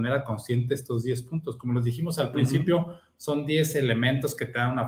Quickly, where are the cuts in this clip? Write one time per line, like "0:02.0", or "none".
none